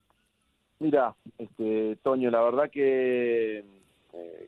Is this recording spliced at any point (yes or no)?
no